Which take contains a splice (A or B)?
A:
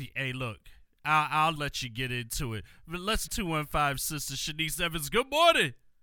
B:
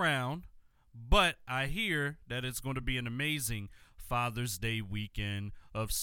A